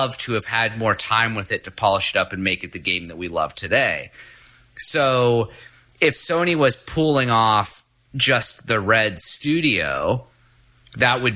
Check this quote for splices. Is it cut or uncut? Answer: uncut